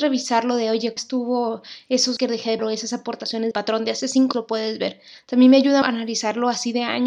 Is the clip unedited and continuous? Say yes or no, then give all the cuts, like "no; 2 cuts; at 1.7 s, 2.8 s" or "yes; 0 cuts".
no; 6 cuts; at 1.0 s, 2.2 s, 2.6 s, 3.5 s, 4.3 s, 5.8 s